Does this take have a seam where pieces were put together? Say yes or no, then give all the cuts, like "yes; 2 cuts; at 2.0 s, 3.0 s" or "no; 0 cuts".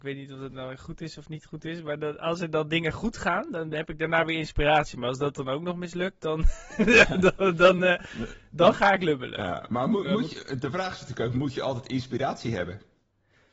no; 0 cuts